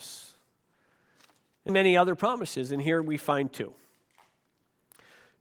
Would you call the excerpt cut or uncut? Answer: cut